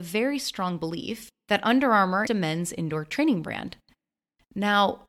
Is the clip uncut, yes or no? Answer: no